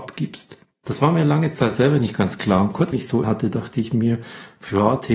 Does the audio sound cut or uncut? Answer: cut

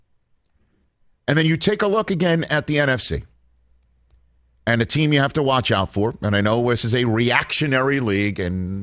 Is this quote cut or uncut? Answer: uncut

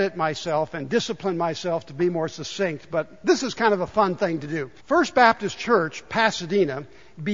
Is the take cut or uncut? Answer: cut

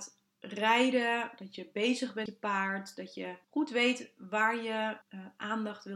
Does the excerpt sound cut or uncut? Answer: cut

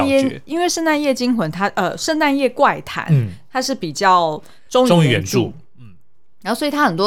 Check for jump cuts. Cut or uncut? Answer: uncut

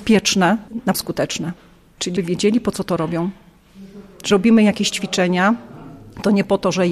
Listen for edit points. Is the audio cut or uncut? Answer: cut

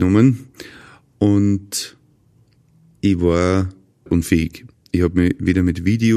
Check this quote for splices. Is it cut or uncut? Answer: cut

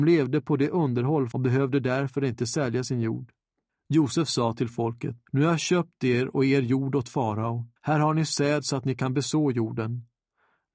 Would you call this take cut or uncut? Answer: cut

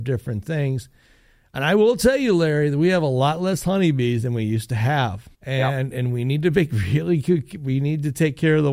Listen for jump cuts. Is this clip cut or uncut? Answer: cut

